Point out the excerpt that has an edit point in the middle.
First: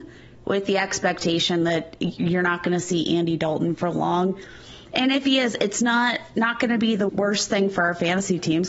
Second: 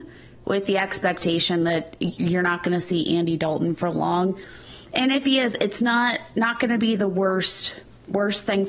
first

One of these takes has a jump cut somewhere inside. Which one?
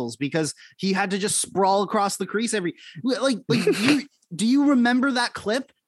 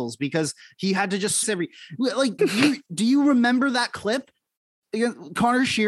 second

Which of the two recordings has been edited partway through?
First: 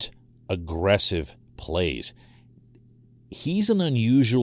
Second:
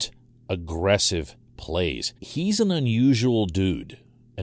second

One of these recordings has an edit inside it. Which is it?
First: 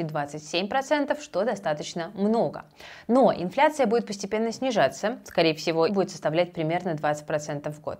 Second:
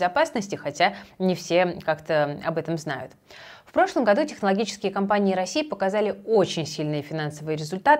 first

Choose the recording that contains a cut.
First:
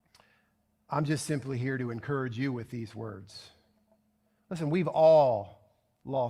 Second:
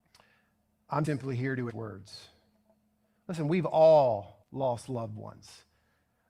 second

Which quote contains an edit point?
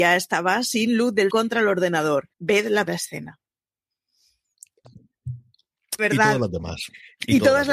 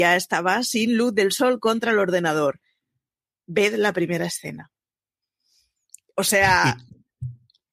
first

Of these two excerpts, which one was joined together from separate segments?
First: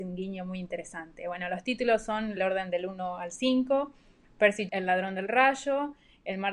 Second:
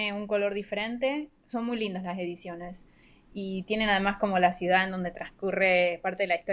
first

